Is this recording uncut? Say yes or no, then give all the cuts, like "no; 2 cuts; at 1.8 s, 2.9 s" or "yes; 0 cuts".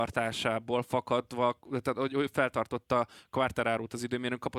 yes; 0 cuts